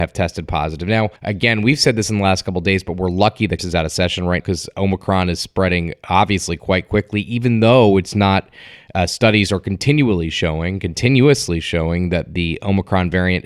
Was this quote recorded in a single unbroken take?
no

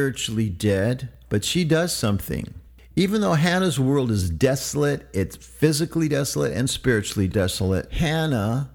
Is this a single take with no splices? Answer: yes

